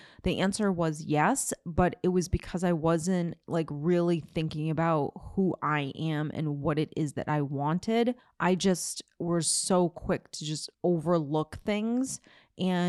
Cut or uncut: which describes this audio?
cut